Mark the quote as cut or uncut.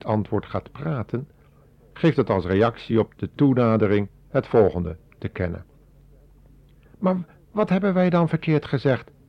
uncut